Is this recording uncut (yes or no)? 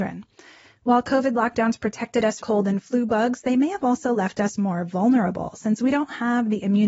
no